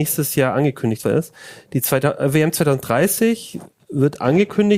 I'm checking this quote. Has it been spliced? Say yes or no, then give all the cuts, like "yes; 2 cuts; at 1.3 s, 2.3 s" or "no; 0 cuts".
yes; 1 cut; at 1.0 s